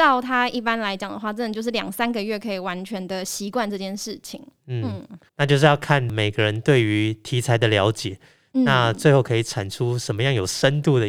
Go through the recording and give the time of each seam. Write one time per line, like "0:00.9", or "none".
0:05.3

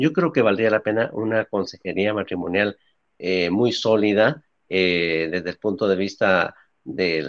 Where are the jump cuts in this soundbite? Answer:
none

